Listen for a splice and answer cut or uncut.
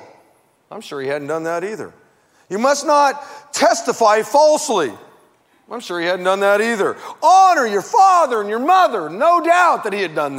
uncut